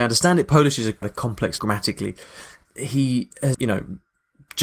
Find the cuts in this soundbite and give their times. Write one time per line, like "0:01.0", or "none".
0:01.0
0:01.6
0:02.6
0:03.5

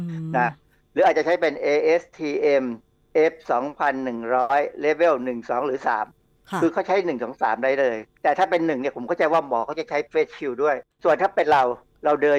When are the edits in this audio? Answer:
0:10.9

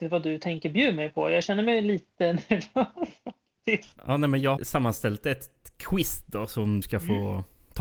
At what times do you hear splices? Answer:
0:04.0
0:04.6
0:06.8

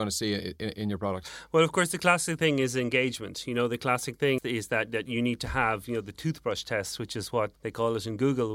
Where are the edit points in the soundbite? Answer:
0:04.4
0:07.5

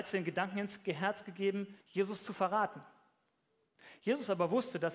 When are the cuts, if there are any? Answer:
0:01.8

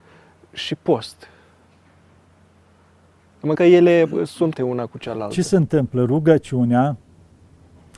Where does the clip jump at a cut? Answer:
0:03.5
0:04.6

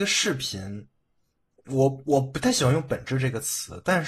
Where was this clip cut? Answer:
none

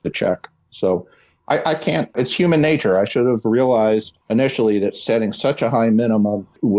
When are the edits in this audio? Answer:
none

